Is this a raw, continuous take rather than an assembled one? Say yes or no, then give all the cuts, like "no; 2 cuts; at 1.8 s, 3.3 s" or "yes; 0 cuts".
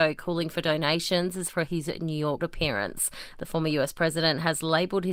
no; 2 cuts; at 1.5 s, 2.4 s